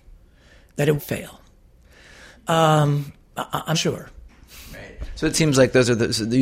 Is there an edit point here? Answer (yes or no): yes